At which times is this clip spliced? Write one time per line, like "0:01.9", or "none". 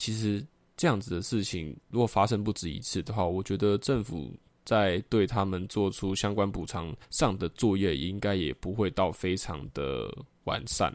0:07.0